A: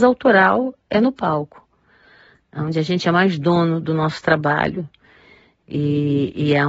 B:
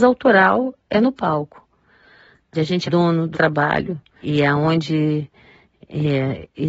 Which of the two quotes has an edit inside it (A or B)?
B